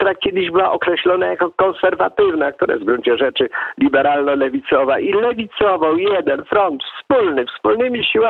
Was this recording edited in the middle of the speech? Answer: yes; 1 cut; at 6.9 s

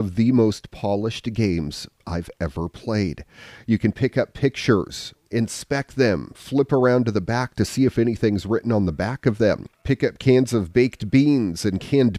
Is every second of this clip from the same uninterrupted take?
yes; 0 cuts

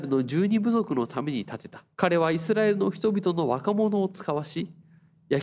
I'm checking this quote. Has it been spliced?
yes; 1 cut; at 1.9 s

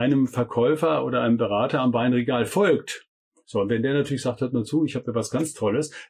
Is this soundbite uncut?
yes; 0 cuts

